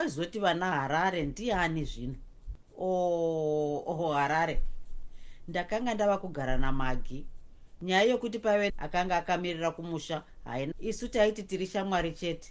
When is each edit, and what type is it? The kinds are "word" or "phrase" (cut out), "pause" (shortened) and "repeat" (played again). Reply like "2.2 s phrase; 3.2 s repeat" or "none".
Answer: 8.7 s word; 10.7 s word